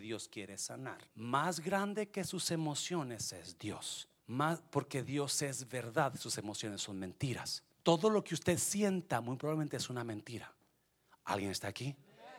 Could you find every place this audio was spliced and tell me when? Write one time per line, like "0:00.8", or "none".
0:01.1
0:04.2
0:07.7